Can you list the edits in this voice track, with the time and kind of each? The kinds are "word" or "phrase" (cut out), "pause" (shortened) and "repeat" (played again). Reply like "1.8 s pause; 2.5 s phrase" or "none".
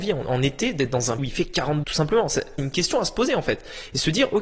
1.2 s word; 1.8 s word; 2.6 s word